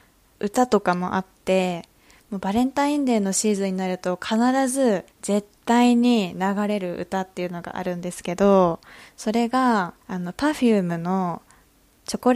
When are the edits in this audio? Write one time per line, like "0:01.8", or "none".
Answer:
0:05.1
0:10.0